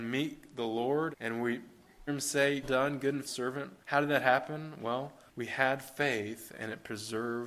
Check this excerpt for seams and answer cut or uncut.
cut